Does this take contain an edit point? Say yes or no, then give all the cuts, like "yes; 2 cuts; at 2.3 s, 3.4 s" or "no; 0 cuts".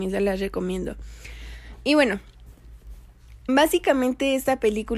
yes; 1 cut; at 3.5 s